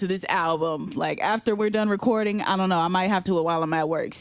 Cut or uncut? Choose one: cut